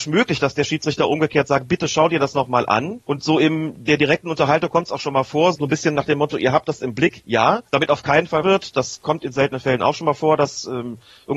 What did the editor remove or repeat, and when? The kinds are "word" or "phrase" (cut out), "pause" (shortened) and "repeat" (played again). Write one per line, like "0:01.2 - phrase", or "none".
0:03.0 - pause
0:05.5 - word
0:07.7 - pause
0:08.4 - phrase